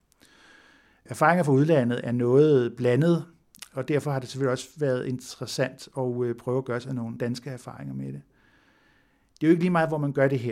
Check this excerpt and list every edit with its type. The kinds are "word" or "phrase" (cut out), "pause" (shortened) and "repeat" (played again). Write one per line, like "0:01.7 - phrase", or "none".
none